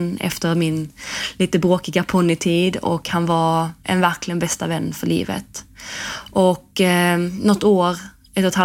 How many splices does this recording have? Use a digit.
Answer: 1